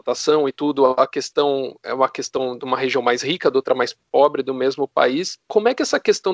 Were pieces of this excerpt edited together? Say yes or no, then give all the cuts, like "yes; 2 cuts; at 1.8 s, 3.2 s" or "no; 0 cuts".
yes; 1 cut; at 5.4 s